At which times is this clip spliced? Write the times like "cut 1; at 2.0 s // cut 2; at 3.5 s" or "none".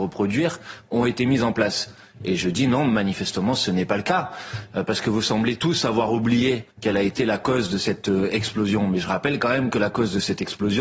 cut 1; at 6.7 s